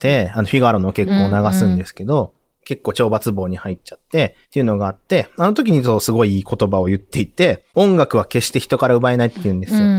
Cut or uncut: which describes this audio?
cut